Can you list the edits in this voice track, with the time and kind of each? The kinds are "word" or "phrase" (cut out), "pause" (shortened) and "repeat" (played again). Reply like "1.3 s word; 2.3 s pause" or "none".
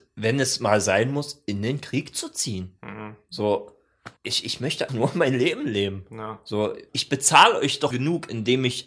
4.2 s pause; 4.9 s word; 6.9 s pause; 7.9 s word